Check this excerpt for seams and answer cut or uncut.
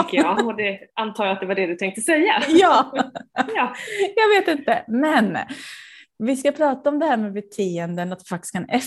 uncut